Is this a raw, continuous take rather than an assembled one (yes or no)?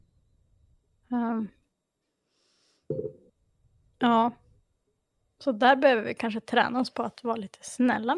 yes